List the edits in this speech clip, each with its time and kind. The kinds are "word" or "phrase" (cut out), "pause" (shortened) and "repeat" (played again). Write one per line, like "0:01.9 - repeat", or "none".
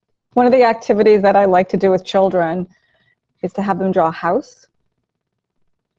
none